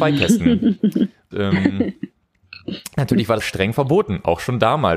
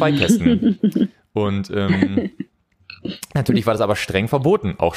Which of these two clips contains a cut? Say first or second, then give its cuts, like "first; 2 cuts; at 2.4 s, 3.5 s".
first; 2 cuts; at 1.3 s, 3.4 s